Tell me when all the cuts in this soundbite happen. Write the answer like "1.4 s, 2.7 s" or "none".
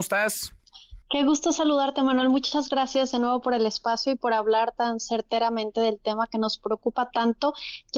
1.0 s